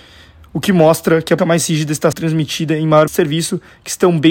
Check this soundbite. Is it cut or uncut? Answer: cut